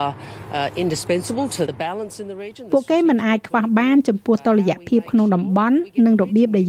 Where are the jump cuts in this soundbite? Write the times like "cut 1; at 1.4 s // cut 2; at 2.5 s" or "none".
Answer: cut 1; at 1.7 s